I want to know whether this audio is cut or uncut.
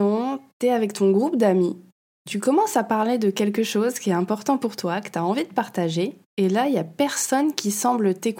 cut